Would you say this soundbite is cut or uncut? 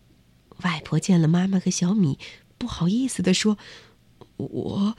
uncut